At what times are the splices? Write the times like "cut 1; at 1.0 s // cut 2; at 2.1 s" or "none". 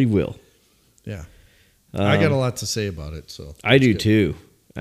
none